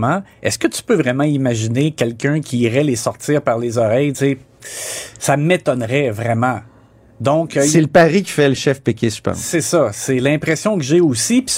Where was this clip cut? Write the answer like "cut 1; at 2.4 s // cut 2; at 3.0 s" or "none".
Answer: none